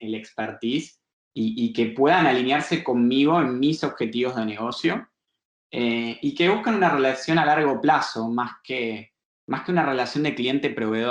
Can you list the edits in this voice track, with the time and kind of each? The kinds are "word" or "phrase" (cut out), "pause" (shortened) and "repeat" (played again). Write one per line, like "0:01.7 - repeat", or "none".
none